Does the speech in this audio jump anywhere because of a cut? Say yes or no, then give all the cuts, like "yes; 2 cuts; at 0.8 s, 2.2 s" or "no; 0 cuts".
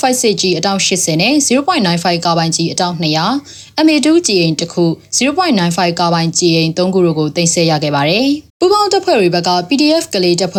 yes; 1 cut; at 8.5 s